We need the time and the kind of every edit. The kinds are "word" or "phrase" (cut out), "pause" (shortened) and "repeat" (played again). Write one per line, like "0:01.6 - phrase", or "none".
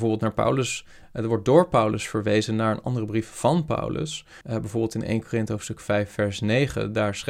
0:04.4 - pause